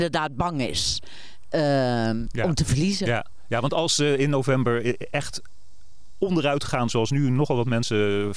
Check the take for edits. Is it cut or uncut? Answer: uncut